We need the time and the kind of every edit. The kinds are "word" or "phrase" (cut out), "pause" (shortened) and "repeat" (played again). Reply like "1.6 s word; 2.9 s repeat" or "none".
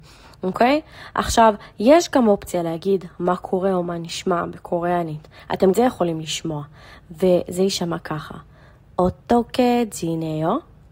5.7 s phrase